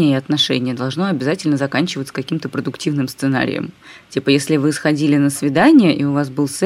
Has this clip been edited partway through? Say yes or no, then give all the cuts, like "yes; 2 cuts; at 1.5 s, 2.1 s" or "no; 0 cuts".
no; 0 cuts